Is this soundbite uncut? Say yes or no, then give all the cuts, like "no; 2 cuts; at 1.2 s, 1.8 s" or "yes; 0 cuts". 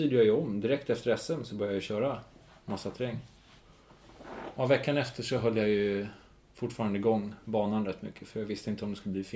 yes; 0 cuts